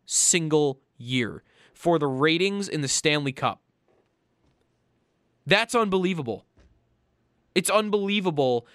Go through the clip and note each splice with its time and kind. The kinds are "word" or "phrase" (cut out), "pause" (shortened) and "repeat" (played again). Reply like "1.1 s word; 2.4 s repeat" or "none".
none